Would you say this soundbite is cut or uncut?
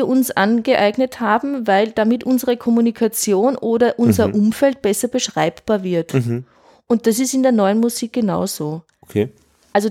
uncut